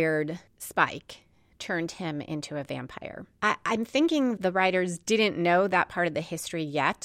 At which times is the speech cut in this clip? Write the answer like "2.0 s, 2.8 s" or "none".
4.4 s